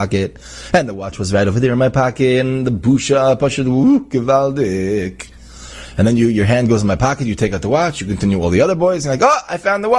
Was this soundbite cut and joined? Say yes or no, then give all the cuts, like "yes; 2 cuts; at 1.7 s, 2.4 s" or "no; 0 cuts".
no; 0 cuts